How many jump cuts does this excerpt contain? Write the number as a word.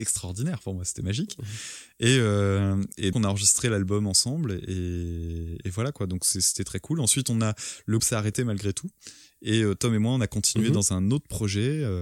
two